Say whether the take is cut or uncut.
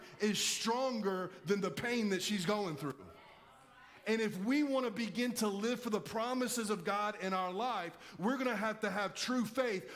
uncut